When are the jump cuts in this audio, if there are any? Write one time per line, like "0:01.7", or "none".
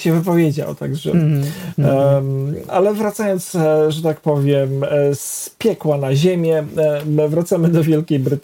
0:02.7